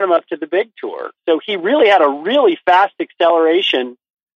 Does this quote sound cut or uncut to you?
uncut